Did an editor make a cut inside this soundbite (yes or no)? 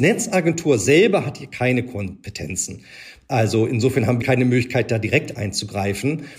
yes